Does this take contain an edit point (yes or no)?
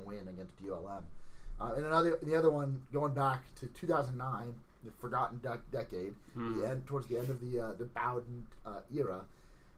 no